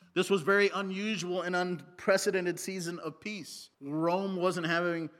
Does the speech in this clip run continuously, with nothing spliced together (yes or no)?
no